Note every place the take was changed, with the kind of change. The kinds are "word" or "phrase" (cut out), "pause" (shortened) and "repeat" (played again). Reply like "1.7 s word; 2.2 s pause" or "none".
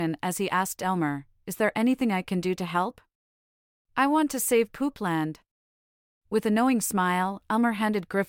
none